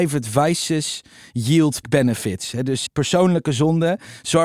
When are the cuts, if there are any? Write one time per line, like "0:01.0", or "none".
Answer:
0:01.8
0:02.9